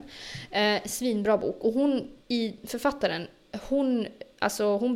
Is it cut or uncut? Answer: cut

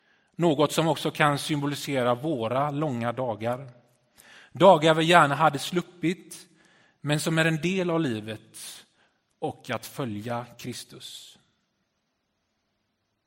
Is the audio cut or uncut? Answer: uncut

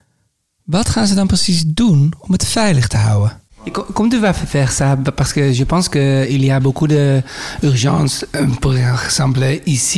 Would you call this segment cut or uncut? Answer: uncut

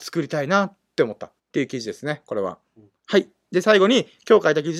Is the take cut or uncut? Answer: cut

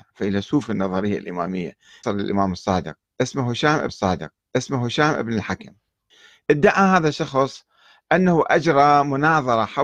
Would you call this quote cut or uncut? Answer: cut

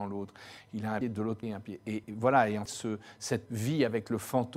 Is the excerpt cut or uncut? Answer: cut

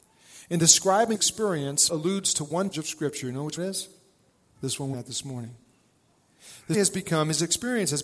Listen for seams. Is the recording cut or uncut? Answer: cut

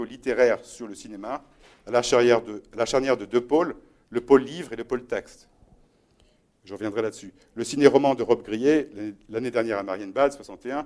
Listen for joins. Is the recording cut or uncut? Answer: uncut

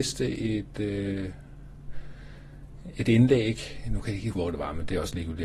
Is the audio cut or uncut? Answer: cut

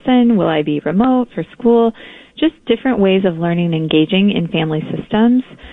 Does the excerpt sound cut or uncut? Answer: uncut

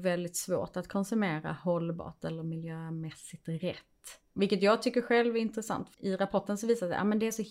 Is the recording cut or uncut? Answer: cut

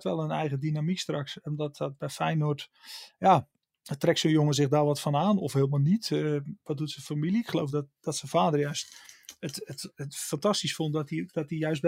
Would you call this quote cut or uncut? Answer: uncut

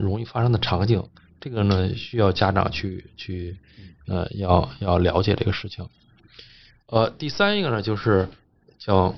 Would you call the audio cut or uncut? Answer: uncut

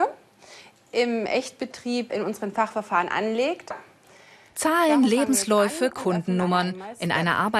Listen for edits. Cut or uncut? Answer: cut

